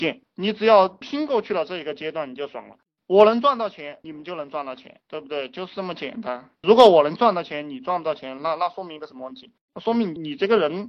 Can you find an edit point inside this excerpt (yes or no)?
no